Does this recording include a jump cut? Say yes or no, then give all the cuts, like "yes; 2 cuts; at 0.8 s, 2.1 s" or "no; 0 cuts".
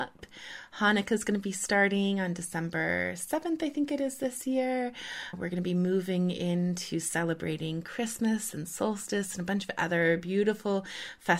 no; 0 cuts